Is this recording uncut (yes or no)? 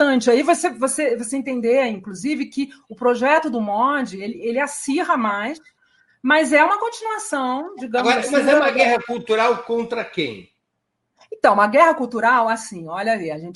yes